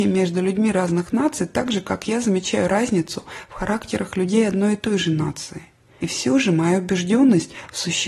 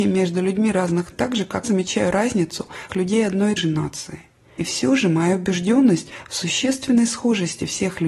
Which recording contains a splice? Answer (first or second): second